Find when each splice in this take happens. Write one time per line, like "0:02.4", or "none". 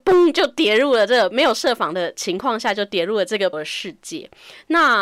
0:03.5